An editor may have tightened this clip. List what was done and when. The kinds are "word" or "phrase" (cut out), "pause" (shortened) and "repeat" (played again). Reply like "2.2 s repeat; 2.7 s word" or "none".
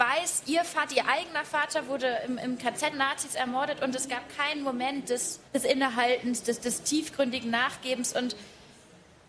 2.9 s word; 5.5 s pause